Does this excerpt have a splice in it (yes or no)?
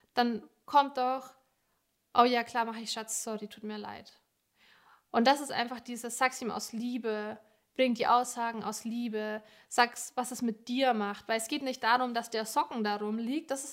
no